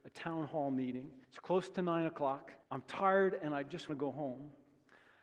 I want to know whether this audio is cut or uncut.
cut